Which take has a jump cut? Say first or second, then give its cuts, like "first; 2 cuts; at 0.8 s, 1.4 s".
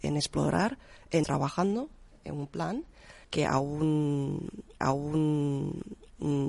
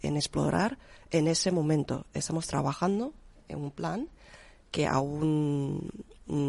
first; 3 cuts; at 1.2 s, 3.2 s, 4.8 s